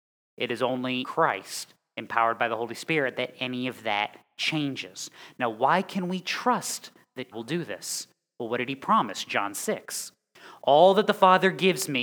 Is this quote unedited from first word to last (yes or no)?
no